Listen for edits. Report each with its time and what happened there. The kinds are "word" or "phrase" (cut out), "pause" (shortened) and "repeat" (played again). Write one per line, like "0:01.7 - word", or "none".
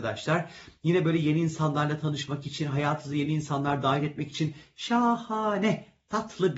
none